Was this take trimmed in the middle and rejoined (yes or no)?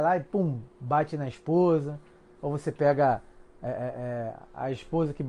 no